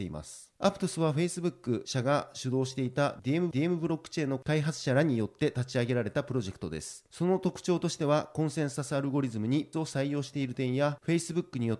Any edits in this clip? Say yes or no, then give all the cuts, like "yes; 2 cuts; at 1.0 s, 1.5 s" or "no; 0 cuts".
yes; 2 cuts; at 3.5 s, 9.7 s